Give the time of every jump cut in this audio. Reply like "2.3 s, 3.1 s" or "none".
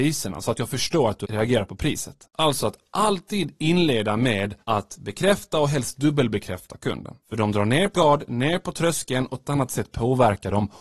2.2 s, 4.6 s, 7.2 s, 7.9 s, 9.4 s